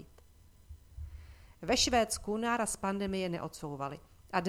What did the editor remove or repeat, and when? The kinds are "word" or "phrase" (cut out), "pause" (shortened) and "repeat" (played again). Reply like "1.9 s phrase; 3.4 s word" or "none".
none